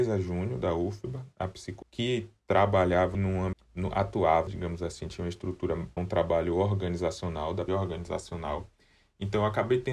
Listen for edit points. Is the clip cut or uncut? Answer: cut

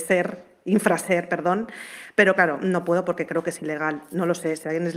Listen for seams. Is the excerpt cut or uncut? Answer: uncut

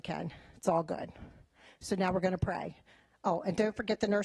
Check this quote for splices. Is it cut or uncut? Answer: uncut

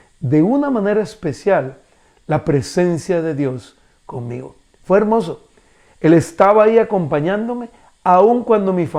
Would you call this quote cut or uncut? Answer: uncut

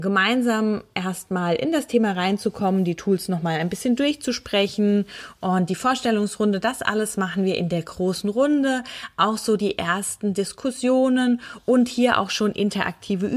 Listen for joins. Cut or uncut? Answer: uncut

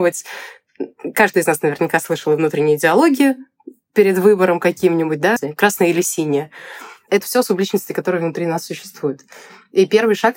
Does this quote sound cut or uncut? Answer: cut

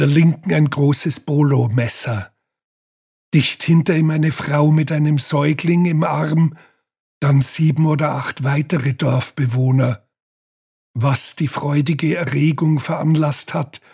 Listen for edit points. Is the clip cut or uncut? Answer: uncut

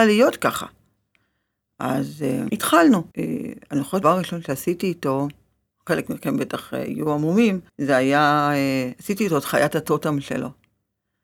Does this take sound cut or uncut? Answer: cut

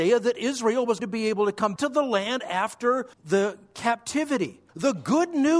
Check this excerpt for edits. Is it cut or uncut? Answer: cut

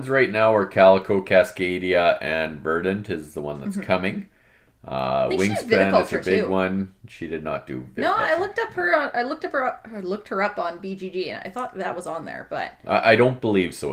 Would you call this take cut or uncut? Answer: uncut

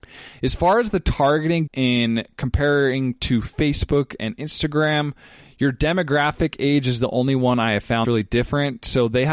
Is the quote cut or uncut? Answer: cut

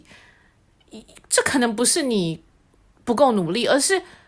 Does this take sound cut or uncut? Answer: uncut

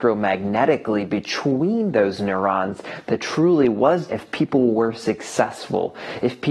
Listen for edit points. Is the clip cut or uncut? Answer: cut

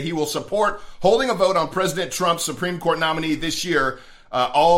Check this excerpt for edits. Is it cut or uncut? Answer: uncut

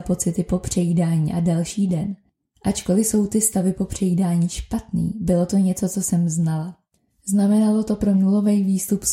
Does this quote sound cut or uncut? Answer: cut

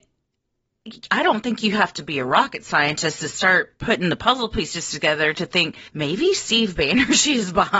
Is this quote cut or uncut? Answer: cut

